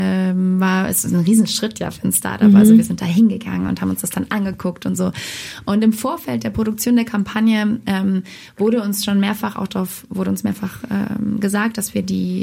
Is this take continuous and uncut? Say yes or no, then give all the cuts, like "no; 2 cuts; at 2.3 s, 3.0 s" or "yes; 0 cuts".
yes; 0 cuts